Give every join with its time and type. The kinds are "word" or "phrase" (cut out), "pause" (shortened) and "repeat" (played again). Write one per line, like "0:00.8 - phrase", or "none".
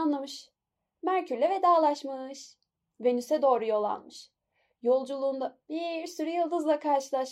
none